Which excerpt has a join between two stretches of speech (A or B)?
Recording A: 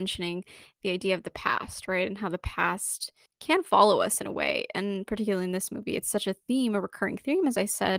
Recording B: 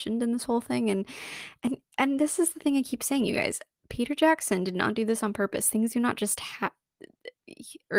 A